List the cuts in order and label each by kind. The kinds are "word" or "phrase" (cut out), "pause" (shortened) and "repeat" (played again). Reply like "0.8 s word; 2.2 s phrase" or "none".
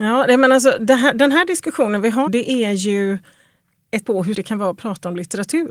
2.3 s word; 4.0 s word; 4.3 s word